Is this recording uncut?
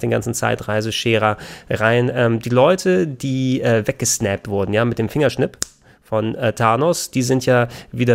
yes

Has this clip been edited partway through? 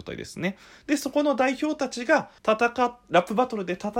yes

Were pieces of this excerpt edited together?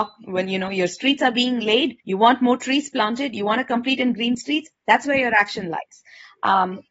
yes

